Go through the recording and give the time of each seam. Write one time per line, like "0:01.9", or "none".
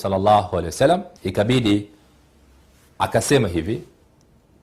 0:01.2